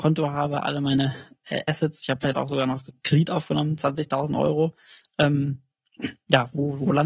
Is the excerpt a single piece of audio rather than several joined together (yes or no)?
yes